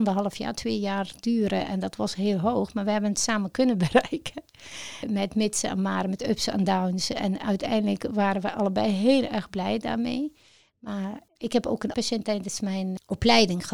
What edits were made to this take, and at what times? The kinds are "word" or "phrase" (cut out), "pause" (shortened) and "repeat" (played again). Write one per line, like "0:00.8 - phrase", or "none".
0:11.4 - word
0:11.9 - word